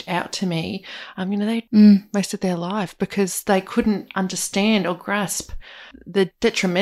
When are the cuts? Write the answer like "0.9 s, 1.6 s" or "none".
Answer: 1.7 s